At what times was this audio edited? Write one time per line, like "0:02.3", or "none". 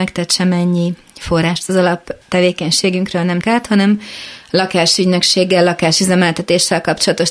0:02.2
0:03.4